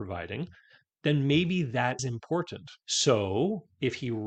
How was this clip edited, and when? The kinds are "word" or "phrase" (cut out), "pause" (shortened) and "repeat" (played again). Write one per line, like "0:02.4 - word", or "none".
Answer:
0:02.0 - word
0:02.8 - pause